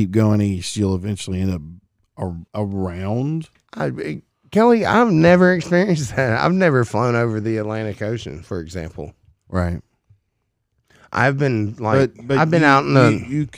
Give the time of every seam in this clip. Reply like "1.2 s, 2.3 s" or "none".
2.5 s